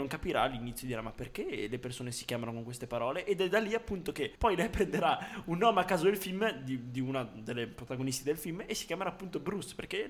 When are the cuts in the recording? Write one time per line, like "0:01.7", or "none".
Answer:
0:04.4